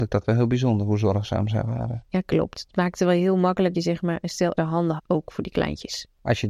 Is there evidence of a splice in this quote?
yes; 4 cuts; at 2.1 s, 3.7 s, 4.6 s, 5.0 s

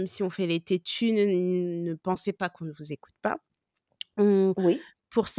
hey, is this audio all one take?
yes; 0 cuts

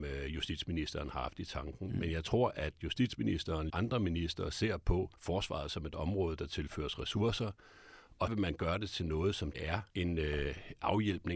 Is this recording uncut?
no; 5 cuts; at 3.7 s, 5.2 s, 8.3 s, 9.5 s, 9.9 s

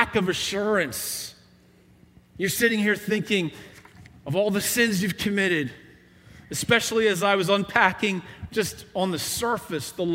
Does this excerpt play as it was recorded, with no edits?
yes; 0 cuts

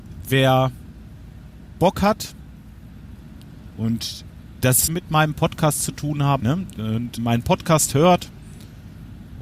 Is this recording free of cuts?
no; 3 cuts; at 4.9 s, 6.4 s, 7.2 s

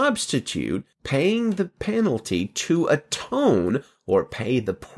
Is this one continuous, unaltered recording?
no; 1 cut; at 0.9 s

